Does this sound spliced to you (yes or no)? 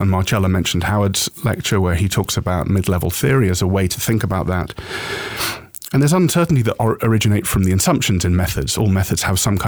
no